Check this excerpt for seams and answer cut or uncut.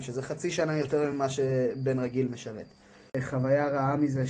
uncut